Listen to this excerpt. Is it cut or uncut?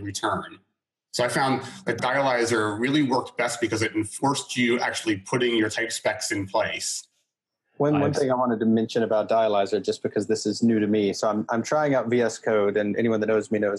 uncut